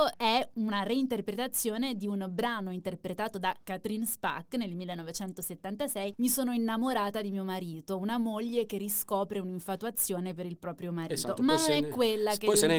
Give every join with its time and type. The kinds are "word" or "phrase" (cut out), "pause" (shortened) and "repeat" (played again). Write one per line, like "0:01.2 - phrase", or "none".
none